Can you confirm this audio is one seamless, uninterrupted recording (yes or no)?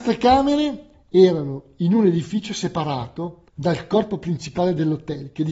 no